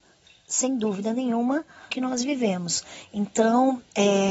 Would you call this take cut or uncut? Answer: cut